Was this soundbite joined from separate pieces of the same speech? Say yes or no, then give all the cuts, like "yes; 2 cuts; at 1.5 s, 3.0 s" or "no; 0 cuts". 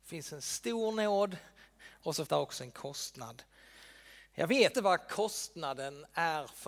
yes; 2 cuts; at 2.3 s, 4.7 s